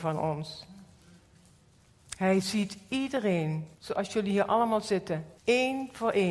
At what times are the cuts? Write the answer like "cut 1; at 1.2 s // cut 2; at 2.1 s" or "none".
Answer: cut 1; at 3.7 s // cut 2; at 5.4 s